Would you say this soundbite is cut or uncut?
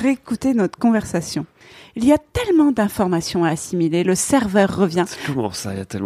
uncut